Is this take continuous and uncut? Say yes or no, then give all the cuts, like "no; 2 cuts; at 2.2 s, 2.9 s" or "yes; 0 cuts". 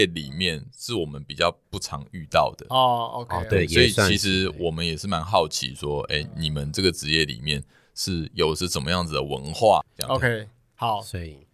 yes; 0 cuts